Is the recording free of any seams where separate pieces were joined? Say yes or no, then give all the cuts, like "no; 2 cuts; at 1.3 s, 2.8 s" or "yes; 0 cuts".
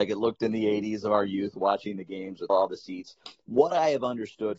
no; 1 cut; at 2.5 s